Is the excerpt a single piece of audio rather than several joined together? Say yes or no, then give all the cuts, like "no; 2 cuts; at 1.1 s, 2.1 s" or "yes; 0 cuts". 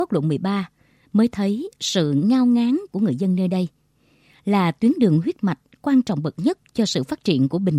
yes; 0 cuts